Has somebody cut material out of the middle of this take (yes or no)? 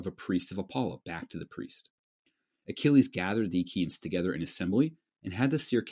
no